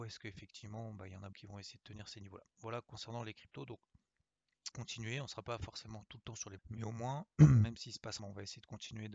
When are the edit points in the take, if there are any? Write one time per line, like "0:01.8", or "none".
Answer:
0:01.3
0:04.7
0:06.6
0:08.2